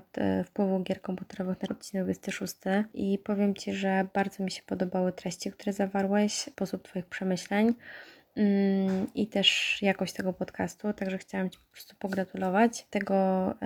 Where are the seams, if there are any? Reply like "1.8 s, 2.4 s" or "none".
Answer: 1.7 s